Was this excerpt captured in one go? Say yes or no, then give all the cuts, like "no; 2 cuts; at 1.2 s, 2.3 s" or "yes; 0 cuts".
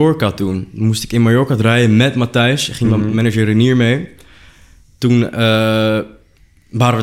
yes; 0 cuts